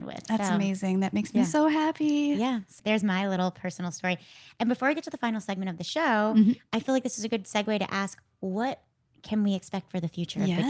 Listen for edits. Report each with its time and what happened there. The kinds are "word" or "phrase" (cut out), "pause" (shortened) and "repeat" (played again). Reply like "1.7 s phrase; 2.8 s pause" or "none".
2.8 s word